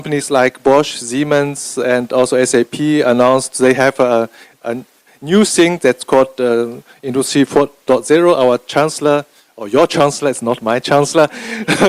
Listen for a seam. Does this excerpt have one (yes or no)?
no